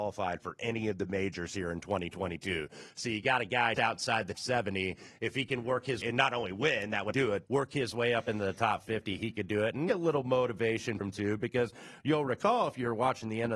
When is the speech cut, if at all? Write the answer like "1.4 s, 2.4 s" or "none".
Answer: 3.7 s, 4.3 s, 6.0 s, 7.1 s, 7.5 s, 9.9 s, 11.0 s